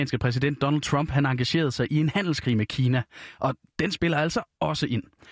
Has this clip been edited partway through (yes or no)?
no